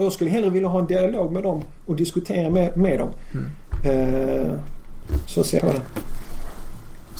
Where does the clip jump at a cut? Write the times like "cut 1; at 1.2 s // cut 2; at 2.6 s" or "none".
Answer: cut 1; at 5.6 s